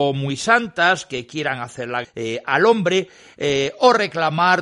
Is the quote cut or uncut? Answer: cut